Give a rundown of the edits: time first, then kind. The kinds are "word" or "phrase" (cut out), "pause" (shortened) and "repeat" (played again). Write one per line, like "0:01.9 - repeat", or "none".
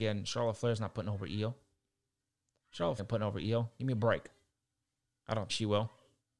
0:03.0 - word
0:05.5 - word